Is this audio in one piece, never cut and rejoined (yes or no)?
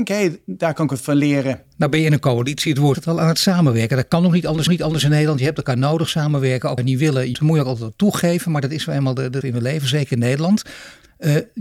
no